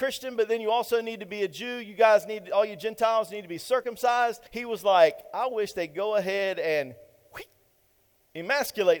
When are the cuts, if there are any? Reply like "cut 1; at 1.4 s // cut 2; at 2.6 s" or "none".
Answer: cut 1; at 4.5 s